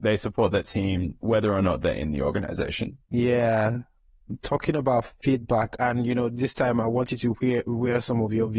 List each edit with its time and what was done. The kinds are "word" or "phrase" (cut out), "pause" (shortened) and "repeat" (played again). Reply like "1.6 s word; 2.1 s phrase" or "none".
3.0 s pause